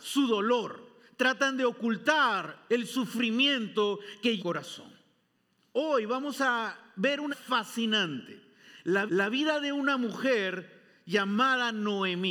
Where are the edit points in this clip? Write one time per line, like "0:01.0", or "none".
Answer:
0:04.4
0:05.3
0:07.3
0:09.1